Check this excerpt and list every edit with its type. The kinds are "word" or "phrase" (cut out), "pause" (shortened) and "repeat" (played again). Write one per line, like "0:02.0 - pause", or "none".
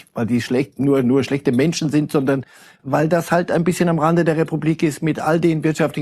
none